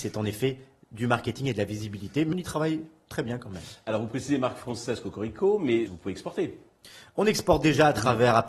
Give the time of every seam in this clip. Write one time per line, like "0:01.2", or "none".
0:02.3
0:05.9